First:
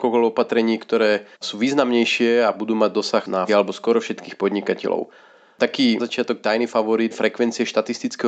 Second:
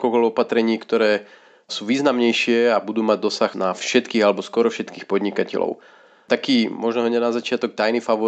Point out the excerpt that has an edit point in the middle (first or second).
first